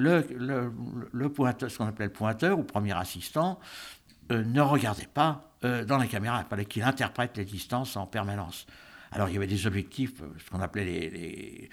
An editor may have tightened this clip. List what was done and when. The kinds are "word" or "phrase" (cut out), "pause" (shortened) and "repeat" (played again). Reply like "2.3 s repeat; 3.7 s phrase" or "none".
none